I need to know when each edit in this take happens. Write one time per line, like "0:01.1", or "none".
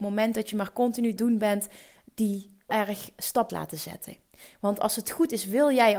0:01.2
0:02.7
0:03.5